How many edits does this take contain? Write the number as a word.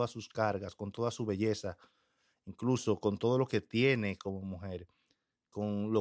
zero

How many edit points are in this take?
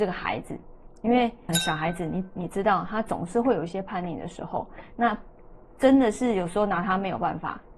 one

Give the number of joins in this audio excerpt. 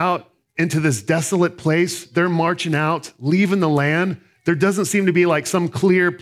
zero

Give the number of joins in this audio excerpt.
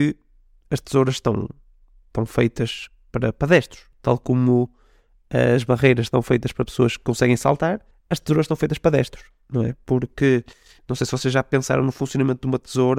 one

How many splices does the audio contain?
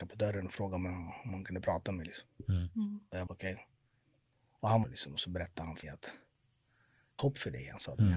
four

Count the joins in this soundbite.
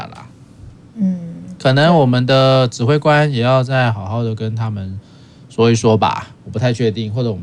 zero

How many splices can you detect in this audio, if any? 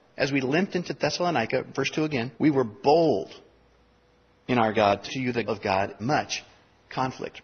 four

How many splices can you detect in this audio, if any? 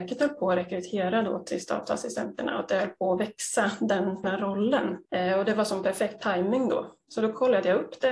two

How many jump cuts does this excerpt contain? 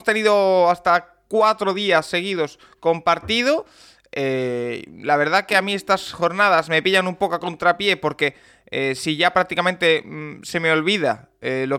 one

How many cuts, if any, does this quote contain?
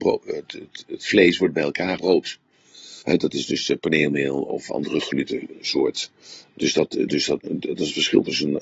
three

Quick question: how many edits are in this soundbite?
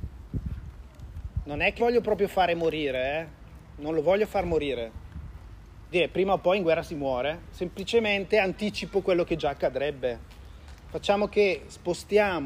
three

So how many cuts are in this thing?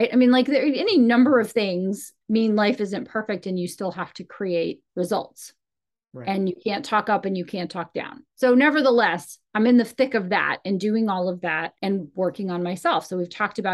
three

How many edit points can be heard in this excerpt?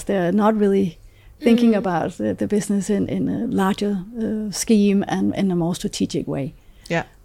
zero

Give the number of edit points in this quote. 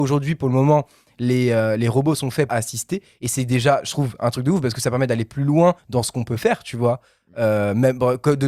two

